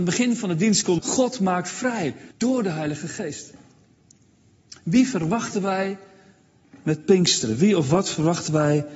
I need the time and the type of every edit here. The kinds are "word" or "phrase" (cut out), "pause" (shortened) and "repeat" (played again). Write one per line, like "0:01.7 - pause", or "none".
0:01.0 - phrase
0:02.3 - pause